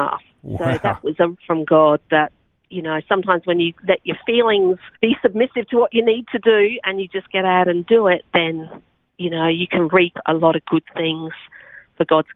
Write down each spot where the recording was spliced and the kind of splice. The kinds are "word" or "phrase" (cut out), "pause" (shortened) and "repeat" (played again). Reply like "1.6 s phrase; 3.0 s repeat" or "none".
1.3 s phrase; 4.9 s pause